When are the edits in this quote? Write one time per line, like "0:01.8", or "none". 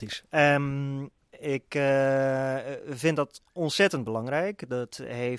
0:01.2